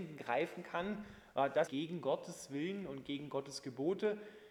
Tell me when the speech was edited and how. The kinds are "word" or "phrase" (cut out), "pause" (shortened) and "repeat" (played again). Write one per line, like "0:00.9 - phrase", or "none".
0:01.7 - phrase